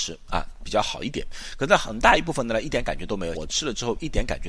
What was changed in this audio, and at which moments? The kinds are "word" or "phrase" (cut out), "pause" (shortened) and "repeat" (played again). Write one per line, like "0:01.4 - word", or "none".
0:03.3 - phrase